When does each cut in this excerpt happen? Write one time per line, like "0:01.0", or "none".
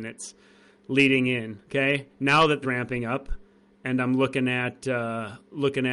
0:01.6
0:02.6